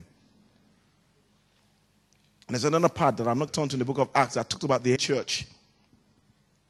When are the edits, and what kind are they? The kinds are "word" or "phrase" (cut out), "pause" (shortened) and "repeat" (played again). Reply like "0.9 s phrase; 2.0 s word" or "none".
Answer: 3.5 s word; 5.0 s word

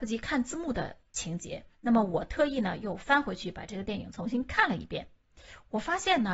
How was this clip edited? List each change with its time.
1.7 s pause

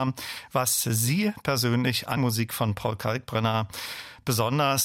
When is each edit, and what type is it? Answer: 2.2 s word

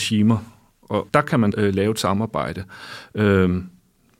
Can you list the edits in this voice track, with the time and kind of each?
1.1 s word; 1.5 s word

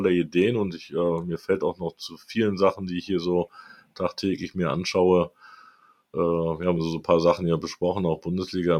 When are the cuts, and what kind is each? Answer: none

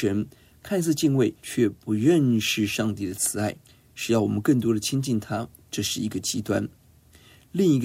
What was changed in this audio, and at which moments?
1.4 s pause; 3.6 s pause

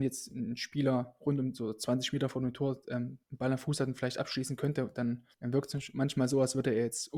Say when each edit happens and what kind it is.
3.2 s pause; 5.3 s pause

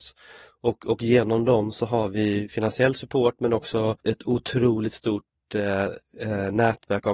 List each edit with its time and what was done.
4.0 s pause

